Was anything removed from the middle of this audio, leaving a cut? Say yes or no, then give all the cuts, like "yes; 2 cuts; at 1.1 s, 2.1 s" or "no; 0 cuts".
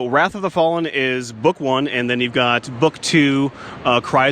no; 0 cuts